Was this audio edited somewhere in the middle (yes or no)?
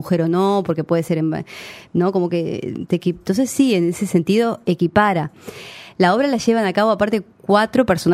no